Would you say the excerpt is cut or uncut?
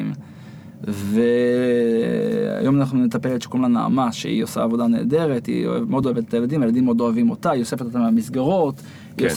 uncut